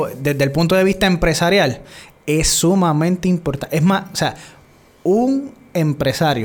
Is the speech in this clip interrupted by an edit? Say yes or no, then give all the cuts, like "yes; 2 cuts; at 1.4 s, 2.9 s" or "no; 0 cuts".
no; 0 cuts